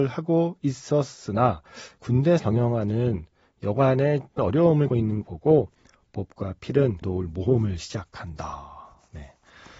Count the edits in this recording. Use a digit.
6